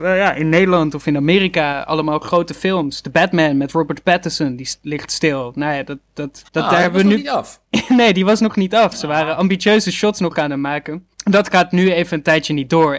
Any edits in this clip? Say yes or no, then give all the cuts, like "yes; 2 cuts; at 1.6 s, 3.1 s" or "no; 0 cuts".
yes; 3 cuts; at 6.5 s, 7.6 s, 11.1 s